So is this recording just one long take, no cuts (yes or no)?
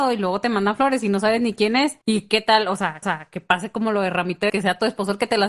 no